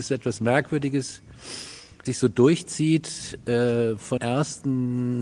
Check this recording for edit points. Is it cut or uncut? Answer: cut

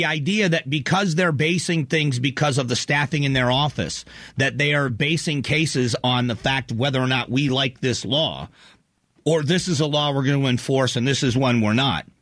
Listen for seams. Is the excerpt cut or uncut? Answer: uncut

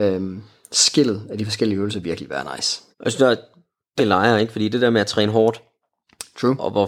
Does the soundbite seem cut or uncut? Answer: cut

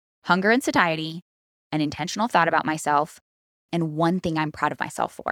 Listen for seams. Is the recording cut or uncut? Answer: uncut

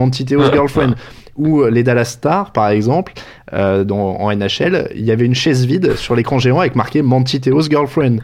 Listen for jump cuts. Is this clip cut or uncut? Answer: uncut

